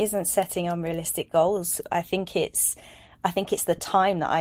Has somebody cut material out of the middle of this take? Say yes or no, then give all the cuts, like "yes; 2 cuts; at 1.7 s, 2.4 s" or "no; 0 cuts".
no; 0 cuts